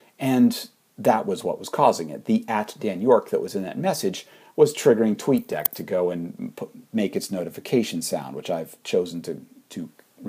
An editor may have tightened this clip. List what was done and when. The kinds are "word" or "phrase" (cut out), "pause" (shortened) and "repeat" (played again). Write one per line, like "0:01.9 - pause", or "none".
none